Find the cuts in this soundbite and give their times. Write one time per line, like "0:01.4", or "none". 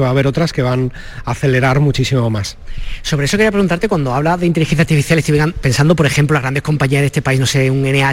none